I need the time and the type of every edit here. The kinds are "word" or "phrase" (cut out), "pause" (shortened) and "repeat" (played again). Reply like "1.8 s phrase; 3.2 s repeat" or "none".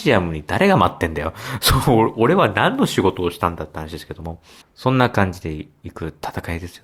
4.6 s pause